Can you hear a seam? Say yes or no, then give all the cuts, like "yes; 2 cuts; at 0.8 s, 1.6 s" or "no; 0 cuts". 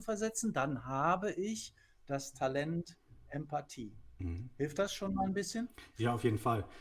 no; 0 cuts